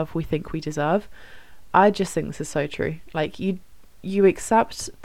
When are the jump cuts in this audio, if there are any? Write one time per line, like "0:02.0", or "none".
none